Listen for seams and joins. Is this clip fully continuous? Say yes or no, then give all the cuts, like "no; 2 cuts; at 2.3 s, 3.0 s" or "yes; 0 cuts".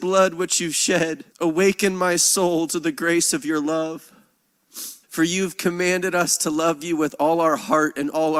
no; 2 cuts; at 1.3 s, 5.0 s